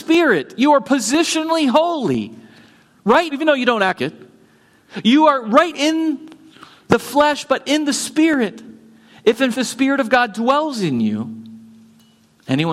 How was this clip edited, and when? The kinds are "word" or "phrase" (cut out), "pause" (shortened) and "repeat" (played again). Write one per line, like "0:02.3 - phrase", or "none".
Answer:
0:03.3 - word
0:04.0 - word
0:05.7 - word
0:09.5 - word